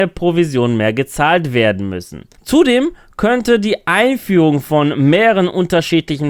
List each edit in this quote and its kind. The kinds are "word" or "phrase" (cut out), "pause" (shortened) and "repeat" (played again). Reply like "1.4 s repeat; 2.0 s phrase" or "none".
none